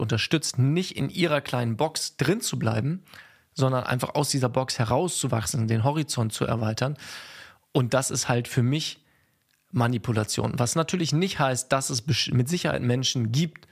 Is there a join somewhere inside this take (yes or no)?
no